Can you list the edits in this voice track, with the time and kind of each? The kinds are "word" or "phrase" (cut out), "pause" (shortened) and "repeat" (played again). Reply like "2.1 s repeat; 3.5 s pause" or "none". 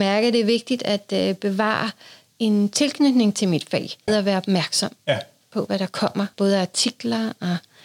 4.1 s word; 5.0 s pause; 6.3 s pause